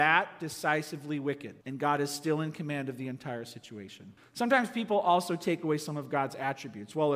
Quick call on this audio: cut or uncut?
cut